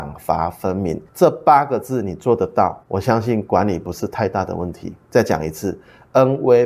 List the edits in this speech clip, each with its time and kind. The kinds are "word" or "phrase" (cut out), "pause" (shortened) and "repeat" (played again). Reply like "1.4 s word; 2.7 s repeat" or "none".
1.1 s pause; 2.8 s pause